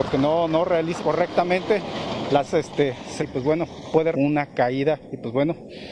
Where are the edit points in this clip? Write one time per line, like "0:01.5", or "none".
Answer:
0:01.0
0:02.5
0:03.2
0:04.1